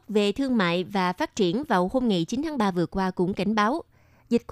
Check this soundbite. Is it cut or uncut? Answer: uncut